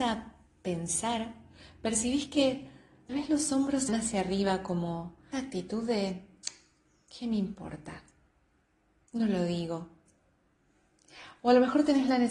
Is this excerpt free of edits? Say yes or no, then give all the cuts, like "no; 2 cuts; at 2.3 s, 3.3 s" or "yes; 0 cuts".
no; 3 cuts; at 3.1 s, 3.9 s, 5.3 s